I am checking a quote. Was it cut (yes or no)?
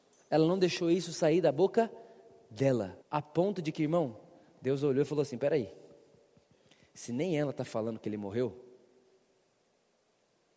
yes